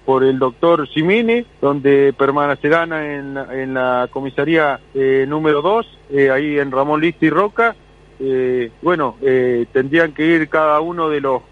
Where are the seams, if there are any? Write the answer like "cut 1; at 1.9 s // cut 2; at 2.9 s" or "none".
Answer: cut 1; at 1.5 s // cut 2; at 4.9 s // cut 3; at 8.7 s